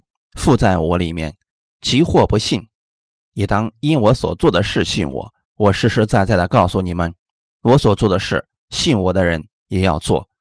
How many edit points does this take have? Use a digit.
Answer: 2